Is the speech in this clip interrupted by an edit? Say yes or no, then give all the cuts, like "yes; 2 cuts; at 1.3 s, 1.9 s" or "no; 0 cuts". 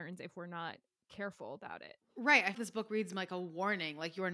yes; 1 cut; at 2.5 s